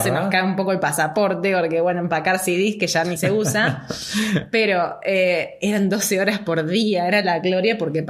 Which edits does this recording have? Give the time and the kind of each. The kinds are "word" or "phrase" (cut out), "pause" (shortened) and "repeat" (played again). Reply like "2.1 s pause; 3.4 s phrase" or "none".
none